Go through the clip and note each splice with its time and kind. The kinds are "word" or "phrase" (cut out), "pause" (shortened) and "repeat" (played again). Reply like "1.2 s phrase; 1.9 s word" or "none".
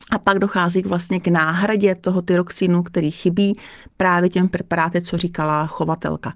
none